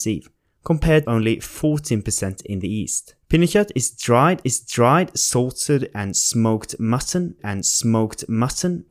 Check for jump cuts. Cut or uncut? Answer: cut